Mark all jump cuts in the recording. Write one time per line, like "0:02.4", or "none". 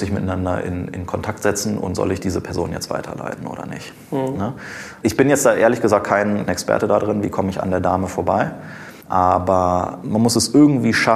0:09.0